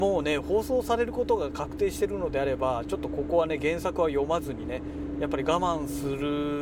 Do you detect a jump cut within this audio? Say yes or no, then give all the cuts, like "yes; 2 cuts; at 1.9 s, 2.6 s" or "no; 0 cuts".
no; 0 cuts